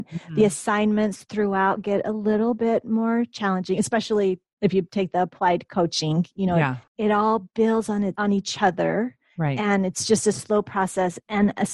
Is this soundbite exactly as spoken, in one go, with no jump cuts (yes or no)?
no